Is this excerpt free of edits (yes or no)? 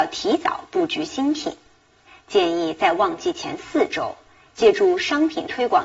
yes